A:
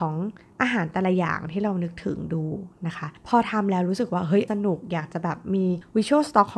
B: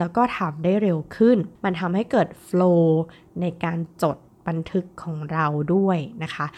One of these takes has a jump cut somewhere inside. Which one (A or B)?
A